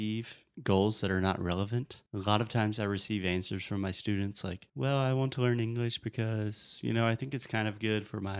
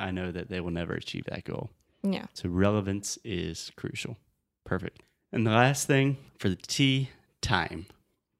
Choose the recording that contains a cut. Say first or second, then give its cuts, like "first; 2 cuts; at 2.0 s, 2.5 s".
first; 2 cuts; at 2.1 s, 4.7 s